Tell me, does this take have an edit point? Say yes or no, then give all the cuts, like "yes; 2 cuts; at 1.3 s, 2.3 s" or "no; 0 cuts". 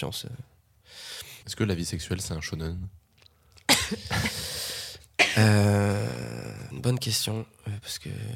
yes; 2 cuts; at 1.4 s, 6.7 s